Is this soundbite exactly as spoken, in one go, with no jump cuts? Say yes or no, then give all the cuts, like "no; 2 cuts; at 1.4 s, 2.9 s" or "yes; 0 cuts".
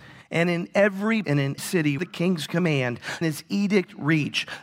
no; 4 cuts; at 1.2 s, 1.6 s, 2.0 s, 3.2 s